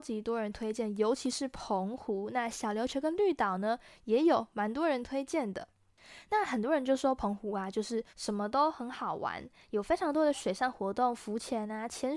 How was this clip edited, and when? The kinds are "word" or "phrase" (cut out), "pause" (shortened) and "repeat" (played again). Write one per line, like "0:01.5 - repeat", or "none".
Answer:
0:08.1 - pause